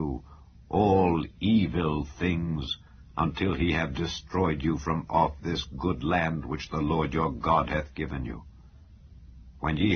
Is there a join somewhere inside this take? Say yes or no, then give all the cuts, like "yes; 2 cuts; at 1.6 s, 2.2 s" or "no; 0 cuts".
no; 0 cuts